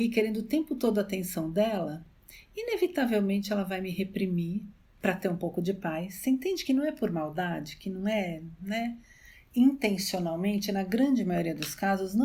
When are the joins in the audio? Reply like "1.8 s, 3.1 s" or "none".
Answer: none